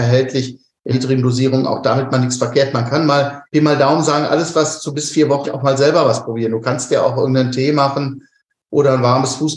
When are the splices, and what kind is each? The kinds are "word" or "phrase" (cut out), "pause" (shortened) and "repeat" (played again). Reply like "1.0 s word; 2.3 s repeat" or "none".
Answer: 0.9 s word; 2.1 s word; 3.5 s pause; 5.4 s phrase